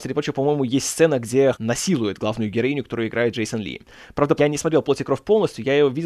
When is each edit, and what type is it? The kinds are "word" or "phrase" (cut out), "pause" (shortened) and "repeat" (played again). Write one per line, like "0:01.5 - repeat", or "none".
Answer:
0:01.5 - word
0:03.3 - word
0:04.4 - word